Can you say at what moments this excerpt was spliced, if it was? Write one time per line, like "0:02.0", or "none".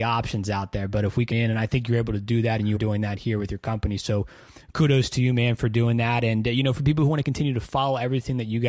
0:01.3
0:02.8